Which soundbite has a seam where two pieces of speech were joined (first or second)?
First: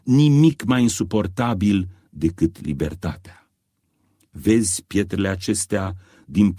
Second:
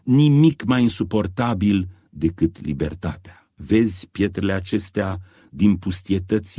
second